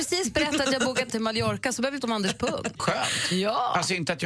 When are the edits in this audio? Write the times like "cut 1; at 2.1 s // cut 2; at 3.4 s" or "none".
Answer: cut 1; at 1.1 s // cut 2; at 2.0 s // cut 3; at 2.8 s